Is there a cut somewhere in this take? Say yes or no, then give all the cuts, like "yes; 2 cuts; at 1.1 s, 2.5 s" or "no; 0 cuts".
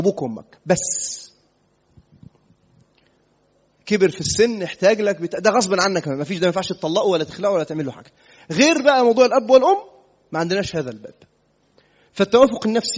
no; 0 cuts